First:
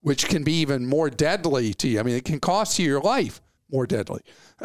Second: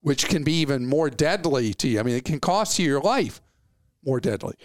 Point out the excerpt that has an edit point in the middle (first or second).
first